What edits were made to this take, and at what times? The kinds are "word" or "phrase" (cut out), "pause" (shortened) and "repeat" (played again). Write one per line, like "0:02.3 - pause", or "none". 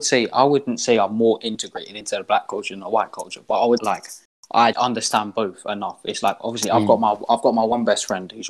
0:03.8 - phrase
0:04.7 - word